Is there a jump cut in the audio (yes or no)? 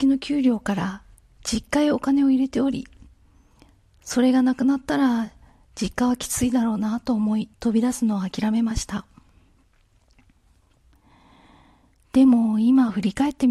yes